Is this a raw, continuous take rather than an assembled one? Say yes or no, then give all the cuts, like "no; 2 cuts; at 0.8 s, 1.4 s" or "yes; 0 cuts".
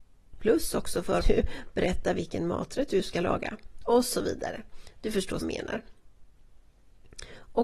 no; 2 cuts; at 1.2 s, 5.4 s